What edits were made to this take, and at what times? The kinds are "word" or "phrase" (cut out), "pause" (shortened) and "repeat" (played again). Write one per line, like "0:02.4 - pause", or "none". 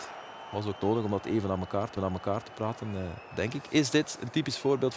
0:02.0 - repeat